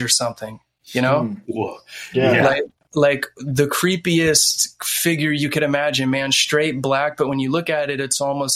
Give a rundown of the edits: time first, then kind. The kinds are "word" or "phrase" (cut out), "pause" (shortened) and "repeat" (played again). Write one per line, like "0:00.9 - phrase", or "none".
none